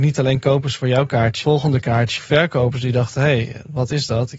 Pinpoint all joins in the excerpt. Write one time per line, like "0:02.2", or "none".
0:01.4
0:02.2